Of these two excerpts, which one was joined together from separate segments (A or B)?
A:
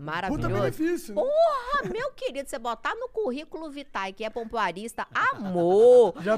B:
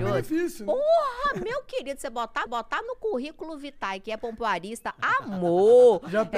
B